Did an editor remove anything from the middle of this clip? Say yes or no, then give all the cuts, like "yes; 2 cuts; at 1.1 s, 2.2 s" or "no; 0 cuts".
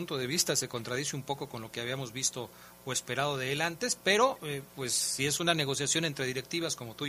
no; 0 cuts